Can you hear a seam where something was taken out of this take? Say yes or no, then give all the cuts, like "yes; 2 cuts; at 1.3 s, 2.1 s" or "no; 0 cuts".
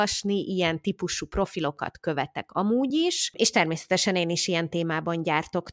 no; 0 cuts